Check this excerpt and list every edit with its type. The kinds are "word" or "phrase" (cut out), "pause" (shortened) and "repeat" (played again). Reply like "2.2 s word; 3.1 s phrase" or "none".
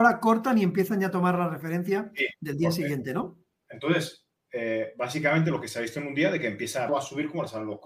6.9 s word